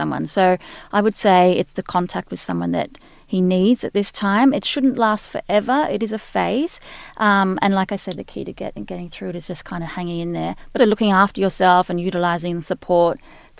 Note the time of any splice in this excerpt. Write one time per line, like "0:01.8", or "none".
0:10.8